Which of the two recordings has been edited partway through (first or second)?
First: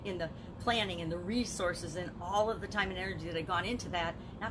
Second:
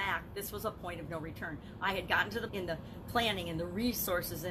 second